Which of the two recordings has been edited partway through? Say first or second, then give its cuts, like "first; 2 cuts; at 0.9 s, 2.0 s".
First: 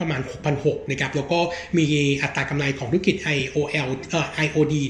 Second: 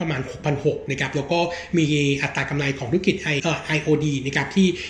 second; 1 cut; at 3.4 s